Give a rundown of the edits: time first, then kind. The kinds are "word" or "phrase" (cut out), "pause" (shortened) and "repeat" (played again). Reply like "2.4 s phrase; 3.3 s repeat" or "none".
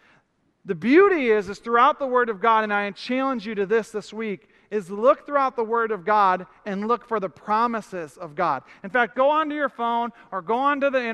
9.1 s word